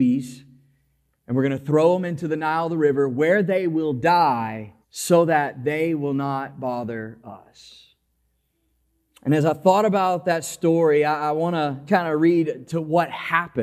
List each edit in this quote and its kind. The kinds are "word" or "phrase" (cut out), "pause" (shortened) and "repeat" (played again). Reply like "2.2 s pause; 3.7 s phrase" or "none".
4.8 s pause; 11.9 s word